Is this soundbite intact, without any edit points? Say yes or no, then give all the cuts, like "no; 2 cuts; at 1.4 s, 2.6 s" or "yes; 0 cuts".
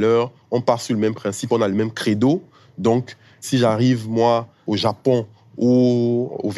yes; 0 cuts